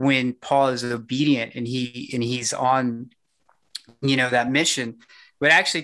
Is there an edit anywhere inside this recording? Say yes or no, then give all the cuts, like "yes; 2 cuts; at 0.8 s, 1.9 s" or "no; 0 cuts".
no; 0 cuts